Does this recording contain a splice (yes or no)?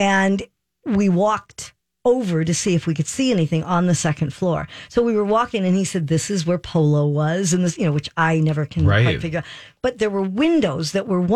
no